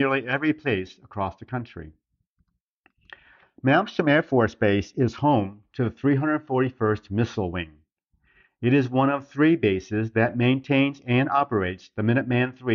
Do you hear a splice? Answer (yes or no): no